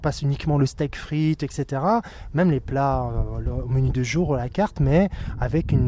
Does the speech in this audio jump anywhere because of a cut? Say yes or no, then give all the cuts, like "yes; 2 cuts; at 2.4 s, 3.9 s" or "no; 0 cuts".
no; 0 cuts